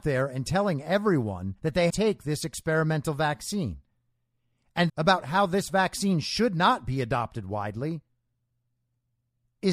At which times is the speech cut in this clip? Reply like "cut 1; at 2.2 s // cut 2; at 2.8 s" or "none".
cut 1; at 1.6 s // cut 2; at 1.9 s // cut 3; at 4.9 s